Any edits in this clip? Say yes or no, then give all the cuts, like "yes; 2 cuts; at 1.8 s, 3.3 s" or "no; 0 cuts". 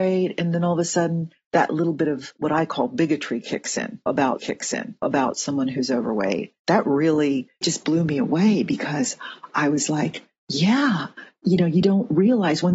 yes; 2 cuts; at 4.4 s, 6.6 s